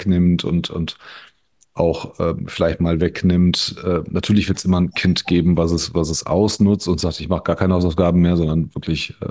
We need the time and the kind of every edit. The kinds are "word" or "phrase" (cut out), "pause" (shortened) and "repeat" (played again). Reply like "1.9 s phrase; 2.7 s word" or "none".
none